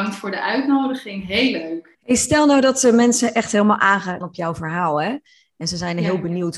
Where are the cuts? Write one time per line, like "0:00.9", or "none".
0:01.9
0:04.2